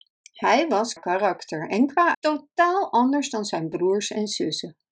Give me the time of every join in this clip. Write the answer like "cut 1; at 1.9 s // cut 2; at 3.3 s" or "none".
cut 1; at 1.0 s // cut 2; at 2.1 s